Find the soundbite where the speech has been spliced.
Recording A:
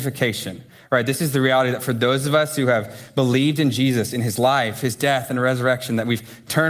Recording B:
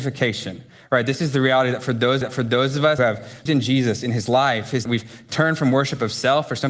B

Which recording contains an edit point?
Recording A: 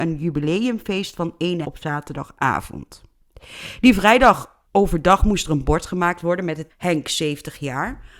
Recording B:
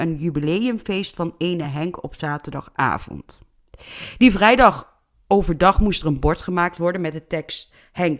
A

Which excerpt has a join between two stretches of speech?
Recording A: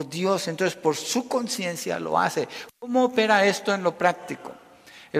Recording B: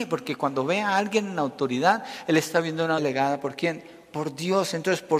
B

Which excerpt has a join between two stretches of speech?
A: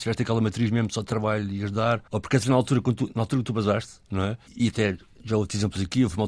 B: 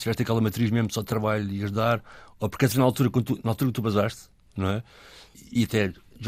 A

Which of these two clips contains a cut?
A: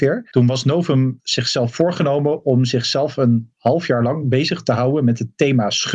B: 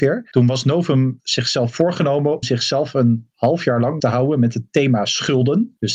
B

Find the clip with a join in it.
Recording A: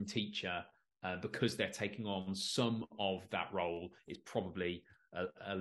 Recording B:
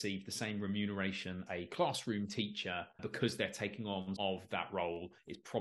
B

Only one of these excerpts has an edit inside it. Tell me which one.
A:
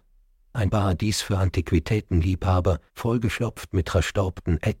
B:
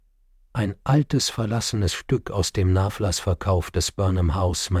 A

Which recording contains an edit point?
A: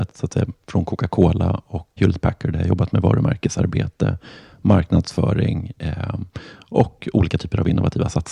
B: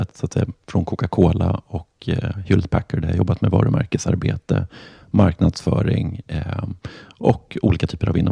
A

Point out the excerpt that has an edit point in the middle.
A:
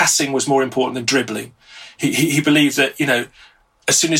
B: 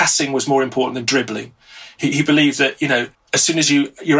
B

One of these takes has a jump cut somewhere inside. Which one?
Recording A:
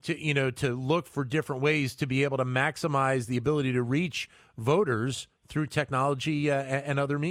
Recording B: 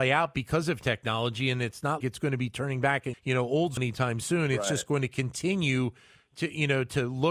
B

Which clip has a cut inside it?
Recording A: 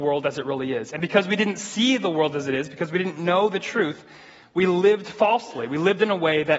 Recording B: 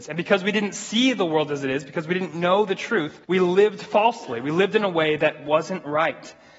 B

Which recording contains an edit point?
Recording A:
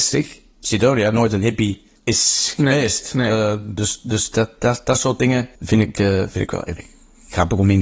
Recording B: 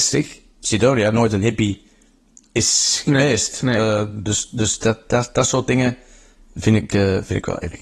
A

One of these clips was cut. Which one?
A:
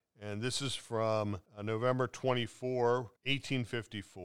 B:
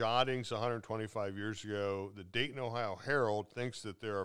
A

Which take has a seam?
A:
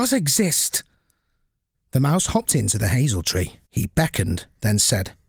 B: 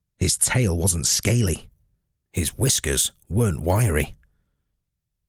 A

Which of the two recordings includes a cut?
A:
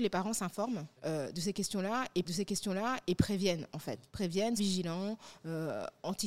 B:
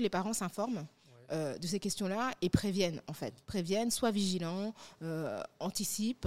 A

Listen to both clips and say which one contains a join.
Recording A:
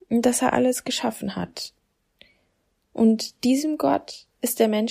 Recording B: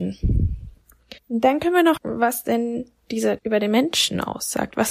B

